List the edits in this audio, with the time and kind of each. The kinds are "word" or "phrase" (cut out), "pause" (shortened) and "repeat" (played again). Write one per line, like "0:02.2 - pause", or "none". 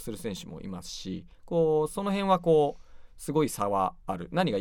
0:01.3 - pause

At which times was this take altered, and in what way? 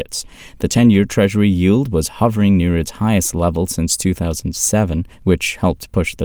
0:05.1 - pause

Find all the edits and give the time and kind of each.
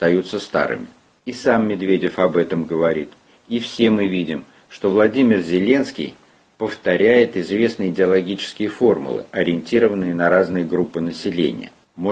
none

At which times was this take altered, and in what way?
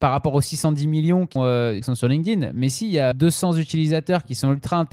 0:01.4 - word
0:01.8 - word
0:03.1 - word

